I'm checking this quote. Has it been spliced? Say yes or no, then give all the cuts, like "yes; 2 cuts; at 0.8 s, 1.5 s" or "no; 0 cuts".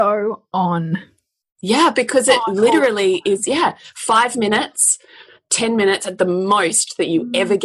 no; 0 cuts